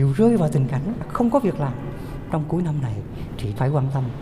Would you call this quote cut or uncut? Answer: uncut